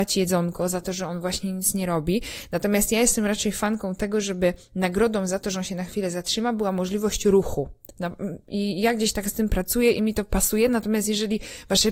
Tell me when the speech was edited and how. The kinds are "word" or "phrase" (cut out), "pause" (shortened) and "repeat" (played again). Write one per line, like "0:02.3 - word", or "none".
none